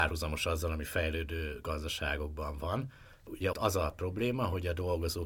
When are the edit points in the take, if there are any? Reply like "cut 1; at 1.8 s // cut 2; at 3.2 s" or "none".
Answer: cut 1; at 3.5 s